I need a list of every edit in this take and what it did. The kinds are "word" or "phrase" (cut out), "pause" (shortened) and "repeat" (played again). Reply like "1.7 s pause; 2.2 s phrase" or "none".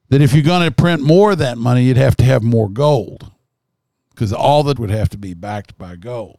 4.8 s word